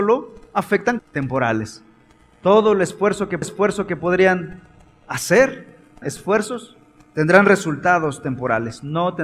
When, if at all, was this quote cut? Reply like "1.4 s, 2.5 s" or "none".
1.0 s, 3.4 s, 6.0 s